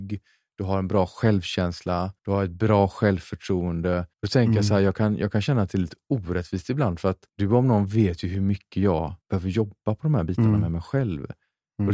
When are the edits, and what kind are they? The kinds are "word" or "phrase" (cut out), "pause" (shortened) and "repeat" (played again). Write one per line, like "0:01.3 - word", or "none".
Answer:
0:02.2 - pause
0:04.1 - pause
0:07.3 - pause
0:09.2 - pause